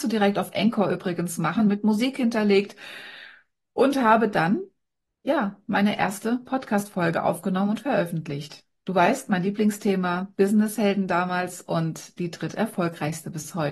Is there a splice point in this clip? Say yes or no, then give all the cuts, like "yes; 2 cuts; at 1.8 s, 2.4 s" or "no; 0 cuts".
no; 0 cuts